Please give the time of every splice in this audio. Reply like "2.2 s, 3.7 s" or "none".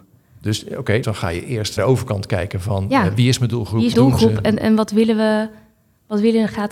1.0 s, 1.8 s, 3.9 s, 4.6 s